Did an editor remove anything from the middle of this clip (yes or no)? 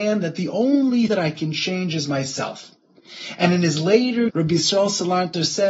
yes